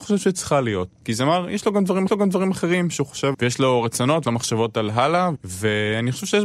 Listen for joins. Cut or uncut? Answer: cut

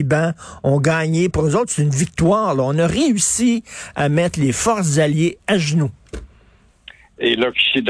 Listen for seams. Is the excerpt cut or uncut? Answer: uncut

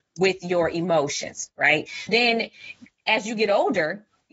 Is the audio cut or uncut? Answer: cut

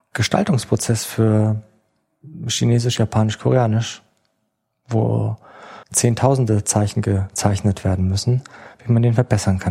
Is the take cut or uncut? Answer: cut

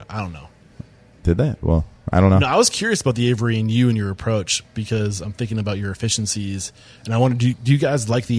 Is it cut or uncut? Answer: uncut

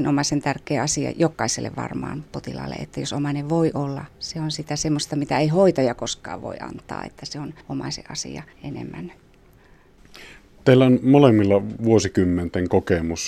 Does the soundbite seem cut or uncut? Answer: cut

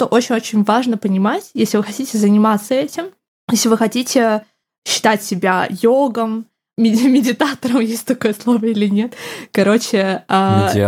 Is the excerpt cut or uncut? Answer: uncut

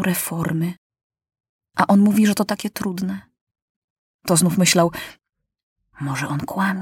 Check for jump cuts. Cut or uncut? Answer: uncut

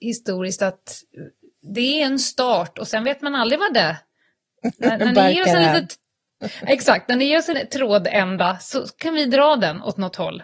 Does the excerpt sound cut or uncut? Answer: cut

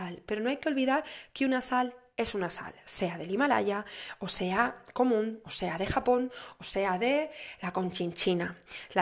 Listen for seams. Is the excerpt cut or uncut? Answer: uncut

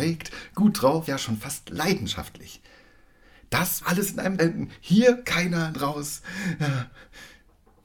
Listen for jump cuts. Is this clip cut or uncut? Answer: cut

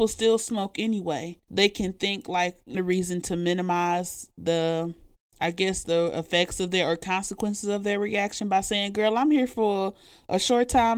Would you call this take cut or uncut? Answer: cut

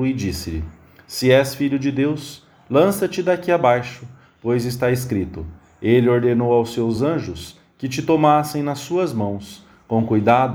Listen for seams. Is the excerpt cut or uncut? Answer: uncut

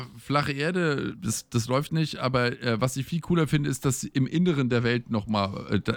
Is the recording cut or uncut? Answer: cut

